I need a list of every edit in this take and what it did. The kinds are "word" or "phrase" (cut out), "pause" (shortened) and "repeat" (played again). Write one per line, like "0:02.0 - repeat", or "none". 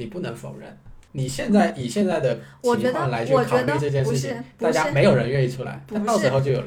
0:01.1 - pause